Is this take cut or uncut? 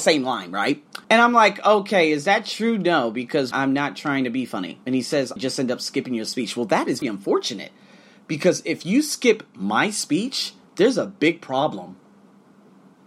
cut